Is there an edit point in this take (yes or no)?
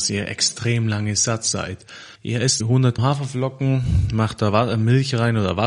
yes